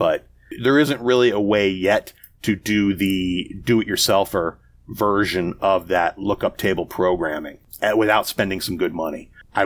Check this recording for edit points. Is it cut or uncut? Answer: uncut